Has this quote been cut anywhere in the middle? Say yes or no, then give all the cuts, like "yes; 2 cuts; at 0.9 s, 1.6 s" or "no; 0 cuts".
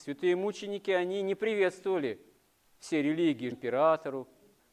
yes; 1 cut; at 3.5 s